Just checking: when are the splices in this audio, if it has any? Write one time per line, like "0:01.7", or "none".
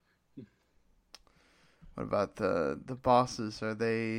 none